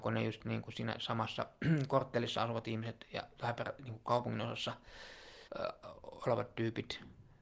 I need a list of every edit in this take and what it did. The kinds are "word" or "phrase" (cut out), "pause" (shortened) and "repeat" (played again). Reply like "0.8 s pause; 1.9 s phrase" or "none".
3.4 s word; 5.5 s pause